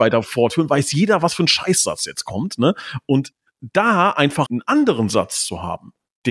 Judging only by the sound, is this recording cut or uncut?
cut